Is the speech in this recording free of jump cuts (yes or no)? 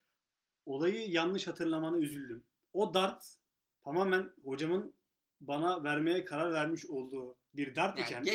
yes